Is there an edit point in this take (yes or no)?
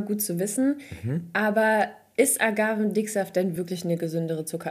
no